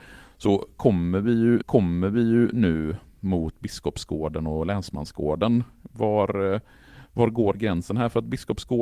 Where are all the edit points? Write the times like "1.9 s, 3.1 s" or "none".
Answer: 1.6 s